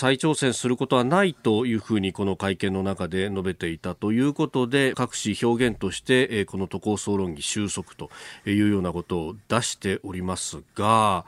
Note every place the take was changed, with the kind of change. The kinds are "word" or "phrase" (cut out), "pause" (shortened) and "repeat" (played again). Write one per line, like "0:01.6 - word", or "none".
0:04.9 - phrase